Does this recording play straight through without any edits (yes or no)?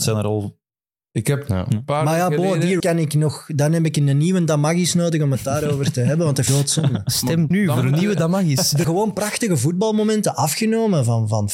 no